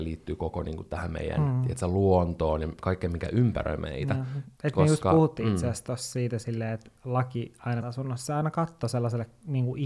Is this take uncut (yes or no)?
no